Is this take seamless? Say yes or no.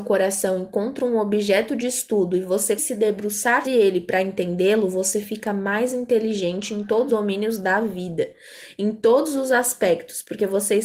no